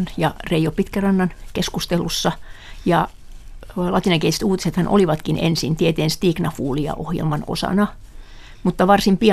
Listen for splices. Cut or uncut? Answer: uncut